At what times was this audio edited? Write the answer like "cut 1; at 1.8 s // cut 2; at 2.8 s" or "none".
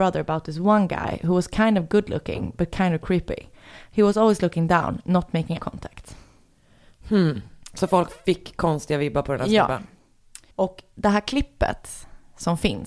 cut 1; at 5.6 s // cut 2; at 10.5 s